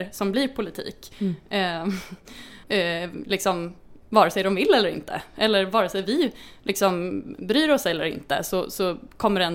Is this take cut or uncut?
cut